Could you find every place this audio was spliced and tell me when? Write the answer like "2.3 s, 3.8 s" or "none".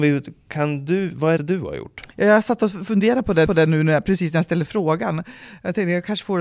1.4 s, 3.5 s